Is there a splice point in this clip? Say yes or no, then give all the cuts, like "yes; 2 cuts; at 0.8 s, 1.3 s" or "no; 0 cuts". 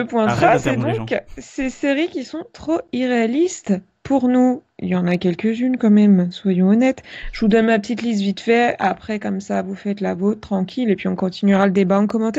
no; 0 cuts